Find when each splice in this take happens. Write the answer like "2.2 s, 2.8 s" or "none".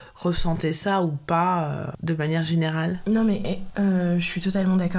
none